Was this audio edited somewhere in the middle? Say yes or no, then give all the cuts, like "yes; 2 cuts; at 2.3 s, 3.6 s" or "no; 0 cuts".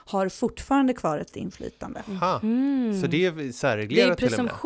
yes; 1 cut; at 1.3 s